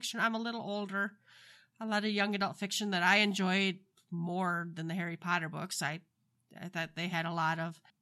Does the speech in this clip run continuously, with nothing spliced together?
yes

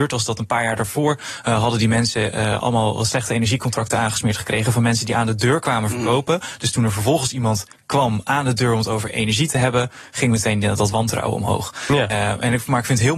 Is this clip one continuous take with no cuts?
yes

